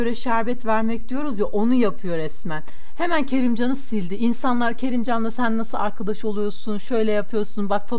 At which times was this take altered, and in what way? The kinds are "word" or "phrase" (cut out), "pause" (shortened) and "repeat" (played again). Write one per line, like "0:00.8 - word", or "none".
none